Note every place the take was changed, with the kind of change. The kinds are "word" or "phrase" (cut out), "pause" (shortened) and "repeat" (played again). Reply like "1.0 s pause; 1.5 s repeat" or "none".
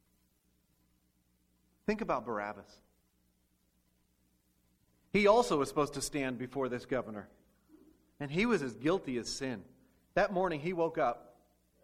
none